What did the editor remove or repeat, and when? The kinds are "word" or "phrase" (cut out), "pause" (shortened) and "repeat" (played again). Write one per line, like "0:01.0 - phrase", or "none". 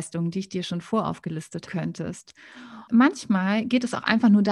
0:01.7 - phrase

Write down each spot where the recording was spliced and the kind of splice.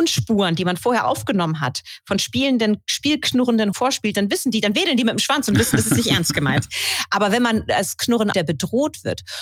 0:03.7 - word
0:08.3 - phrase

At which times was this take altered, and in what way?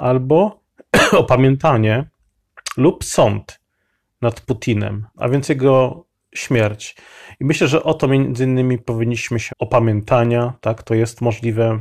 0:05.1 - pause
0:09.5 - phrase

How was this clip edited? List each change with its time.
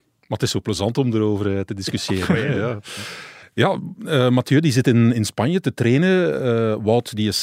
0:03.4 - pause

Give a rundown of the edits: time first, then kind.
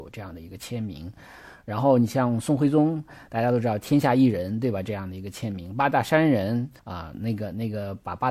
0:06.8 - pause

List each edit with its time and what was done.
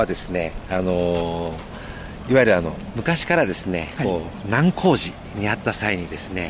none

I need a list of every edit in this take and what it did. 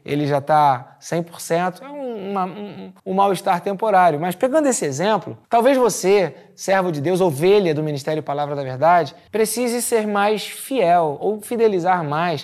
0:03.0 - pause
0:05.4 - pause
0:09.3 - pause

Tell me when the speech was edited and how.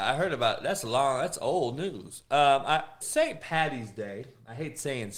0:03.0 - word

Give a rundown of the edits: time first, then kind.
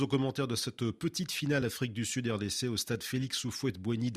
none

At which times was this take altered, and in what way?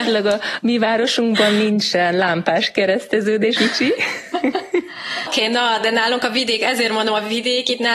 0:03.6 - word
0:05.3 - word

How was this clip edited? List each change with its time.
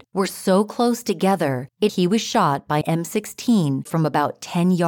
0:01.9 - word
0:02.8 - word
0:03.9 - word

